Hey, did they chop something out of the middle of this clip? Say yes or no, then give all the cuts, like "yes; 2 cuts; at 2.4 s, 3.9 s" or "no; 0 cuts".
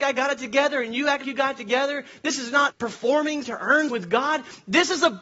yes; 4 cuts; at 1.2 s, 2.7 s, 3.4 s, 3.9 s